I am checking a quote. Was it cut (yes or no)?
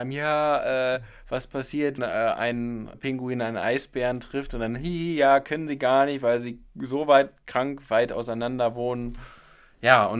yes